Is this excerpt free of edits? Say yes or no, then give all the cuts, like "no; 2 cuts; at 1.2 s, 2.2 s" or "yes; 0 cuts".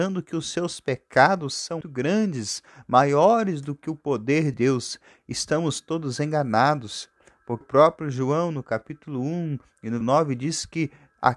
no; 4 cuts; at 1.8 s, 4.5 s, 7.6 s, 10.0 s